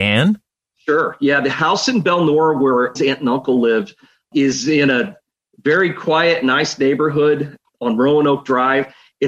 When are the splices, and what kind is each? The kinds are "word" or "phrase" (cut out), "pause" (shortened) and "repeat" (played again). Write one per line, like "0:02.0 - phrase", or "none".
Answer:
0:03.0 - word